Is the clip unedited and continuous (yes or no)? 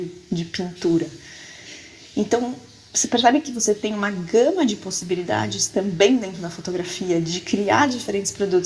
yes